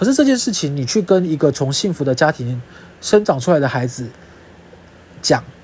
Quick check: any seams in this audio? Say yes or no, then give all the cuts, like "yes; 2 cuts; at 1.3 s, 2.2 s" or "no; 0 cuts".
no; 0 cuts